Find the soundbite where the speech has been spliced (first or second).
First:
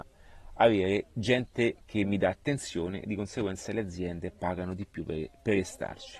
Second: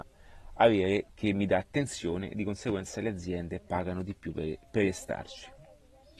second